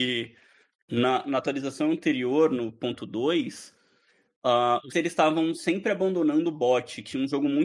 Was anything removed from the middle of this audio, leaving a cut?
yes; 1 cut; at 4.9 s

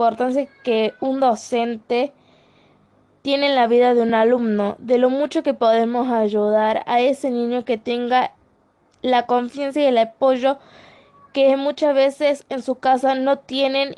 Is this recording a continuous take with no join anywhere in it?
yes; 0 cuts

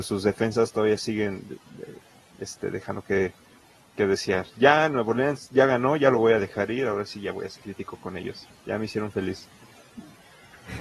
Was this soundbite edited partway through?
yes; 2 cuts; at 7.6 s, 8.5 s

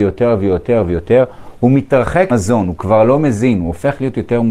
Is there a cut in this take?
yes; 1 cut; at 2.3 s

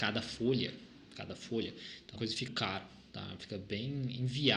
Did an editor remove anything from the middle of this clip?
yes; 2 cuts; at 2.2 s, 2.5 s

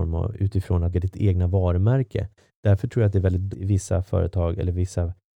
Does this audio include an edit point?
yes; 2 cuts; at 0.9 s, 3.5 s

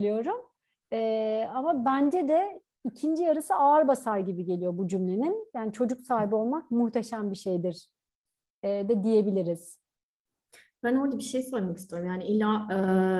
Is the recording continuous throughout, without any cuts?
yes; 0 cuts

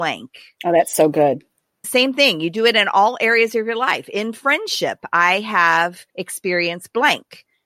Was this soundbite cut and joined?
yes; 2 cuts; at 1.8 s, 6.1 s

